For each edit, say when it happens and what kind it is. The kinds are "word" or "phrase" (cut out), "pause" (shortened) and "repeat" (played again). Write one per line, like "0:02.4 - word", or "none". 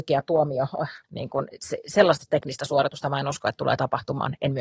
0:01.0 - pause